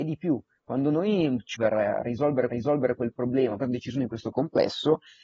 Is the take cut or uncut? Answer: cut